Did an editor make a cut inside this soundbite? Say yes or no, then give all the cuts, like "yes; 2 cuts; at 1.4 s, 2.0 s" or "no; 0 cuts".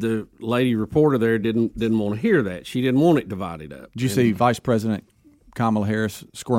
no; 0 cuts